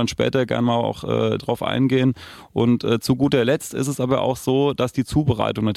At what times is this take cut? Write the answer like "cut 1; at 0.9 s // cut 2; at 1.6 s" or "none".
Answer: cut 1; at 1.4 s